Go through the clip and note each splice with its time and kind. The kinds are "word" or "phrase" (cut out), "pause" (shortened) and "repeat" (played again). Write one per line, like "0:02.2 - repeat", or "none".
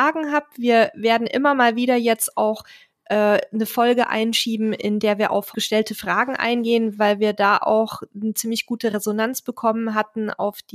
0:05.5 - word